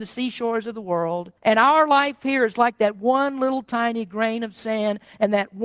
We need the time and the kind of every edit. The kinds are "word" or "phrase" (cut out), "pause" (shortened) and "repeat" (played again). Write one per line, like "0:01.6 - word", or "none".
0:01.4 - pause